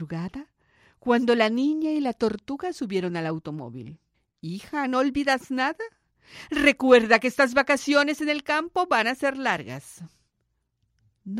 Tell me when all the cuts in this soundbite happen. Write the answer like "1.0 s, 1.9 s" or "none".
4.1 s

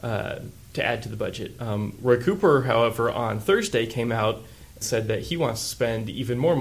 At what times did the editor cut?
4.8 s

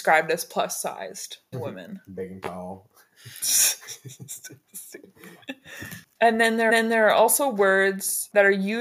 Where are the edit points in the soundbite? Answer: 1.5 s, 6.7 s

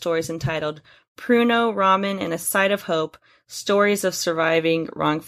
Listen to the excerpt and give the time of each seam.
none

